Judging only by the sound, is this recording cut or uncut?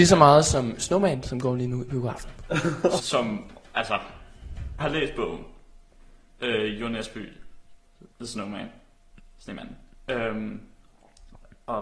cut